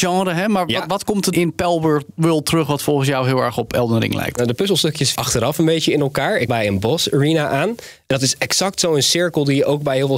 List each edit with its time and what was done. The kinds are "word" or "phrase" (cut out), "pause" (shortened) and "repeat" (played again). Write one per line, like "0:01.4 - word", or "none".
0:01.3 - word
0:05.1 - word
0:06.5 - word